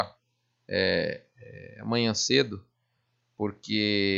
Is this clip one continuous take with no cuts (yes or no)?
yes